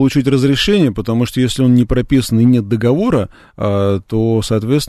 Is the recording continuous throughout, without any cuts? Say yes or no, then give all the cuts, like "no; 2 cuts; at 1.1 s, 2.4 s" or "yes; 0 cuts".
yes; 0 cuts